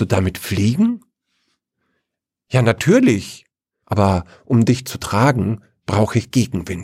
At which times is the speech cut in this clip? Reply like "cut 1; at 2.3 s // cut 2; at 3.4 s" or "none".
none